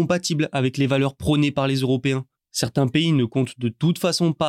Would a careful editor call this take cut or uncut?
uncut